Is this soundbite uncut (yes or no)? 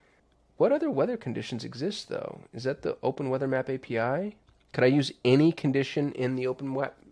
yes